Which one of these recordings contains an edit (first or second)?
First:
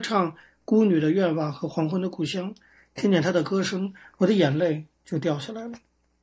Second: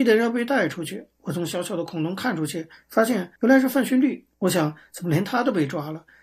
second